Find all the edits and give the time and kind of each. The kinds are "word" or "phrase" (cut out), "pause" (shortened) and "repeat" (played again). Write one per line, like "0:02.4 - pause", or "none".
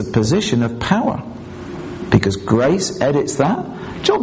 none